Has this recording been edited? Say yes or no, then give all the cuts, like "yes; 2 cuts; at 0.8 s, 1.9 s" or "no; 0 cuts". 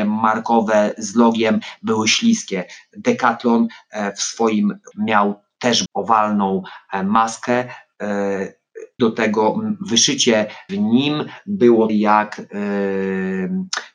yes; 5 cuts; at 4.9 s, 5.9 s, 9.0 s, 10.7 s, 11.9 s